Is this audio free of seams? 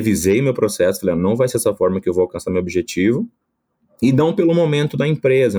yes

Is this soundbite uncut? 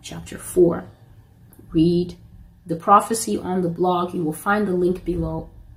yes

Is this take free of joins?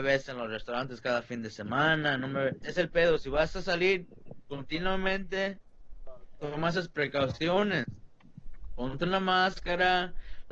no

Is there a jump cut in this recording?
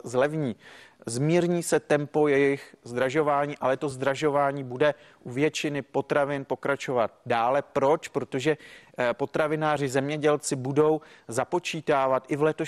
no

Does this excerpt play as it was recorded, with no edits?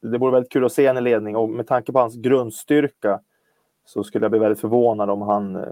yes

